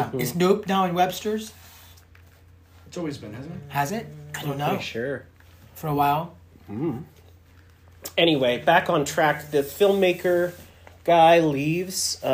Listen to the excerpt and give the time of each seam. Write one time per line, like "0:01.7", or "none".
none